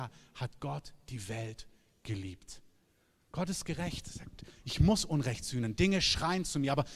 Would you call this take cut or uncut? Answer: uncut